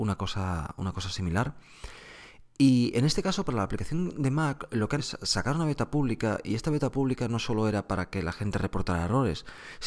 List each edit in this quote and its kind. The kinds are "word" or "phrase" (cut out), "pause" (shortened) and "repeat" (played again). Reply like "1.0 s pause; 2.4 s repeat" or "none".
5.0 s word